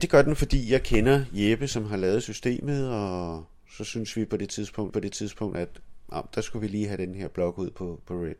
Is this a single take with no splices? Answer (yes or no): no